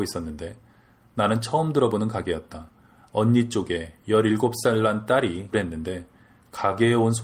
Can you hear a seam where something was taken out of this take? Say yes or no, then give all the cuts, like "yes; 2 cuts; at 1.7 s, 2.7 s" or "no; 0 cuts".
yes; 1 cut; at 5.5 s